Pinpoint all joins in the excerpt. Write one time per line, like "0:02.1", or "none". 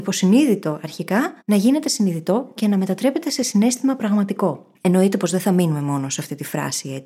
0:01.4
0:04.8